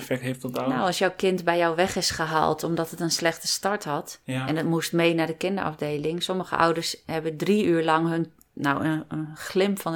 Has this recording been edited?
no; 0 cuts

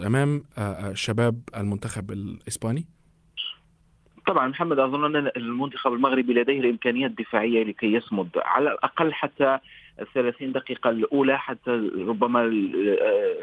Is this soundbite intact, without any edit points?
yes; 0 cuts

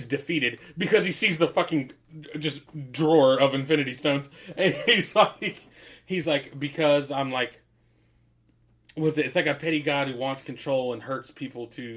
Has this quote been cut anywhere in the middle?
no; 0 cuts

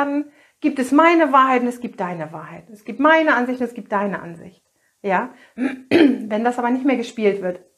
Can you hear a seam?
no; 0 cuts

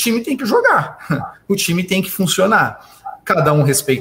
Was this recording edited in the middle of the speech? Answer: no; 0 cuts

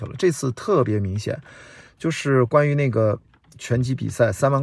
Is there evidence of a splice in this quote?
no; 0 cuts

